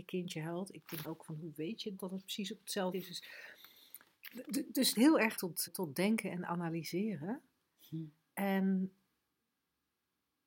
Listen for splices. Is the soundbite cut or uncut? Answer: cut